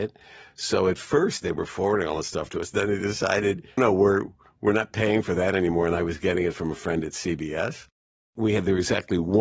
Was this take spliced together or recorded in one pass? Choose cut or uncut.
cut